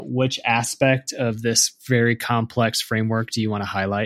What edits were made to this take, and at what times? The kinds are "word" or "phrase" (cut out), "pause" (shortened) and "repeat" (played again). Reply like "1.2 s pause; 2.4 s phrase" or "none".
none